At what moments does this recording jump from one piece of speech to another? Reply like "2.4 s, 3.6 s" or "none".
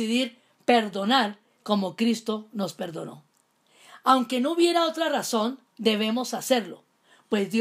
5.7 s